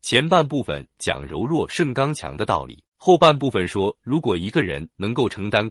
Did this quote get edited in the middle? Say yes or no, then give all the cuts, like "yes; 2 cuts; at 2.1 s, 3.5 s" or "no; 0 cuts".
yes; 1 cut; at 2.9 s